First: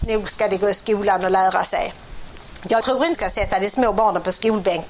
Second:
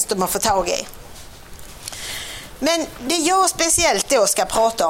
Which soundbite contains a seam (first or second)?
first